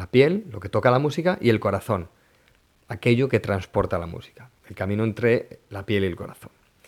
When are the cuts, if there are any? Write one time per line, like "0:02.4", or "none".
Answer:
none